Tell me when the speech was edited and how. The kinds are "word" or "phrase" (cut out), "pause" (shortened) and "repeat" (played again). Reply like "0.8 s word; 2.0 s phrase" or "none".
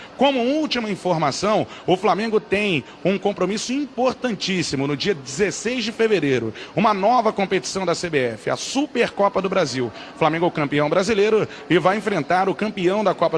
none